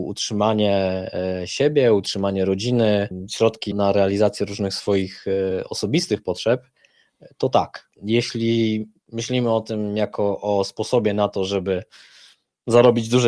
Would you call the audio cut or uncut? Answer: cut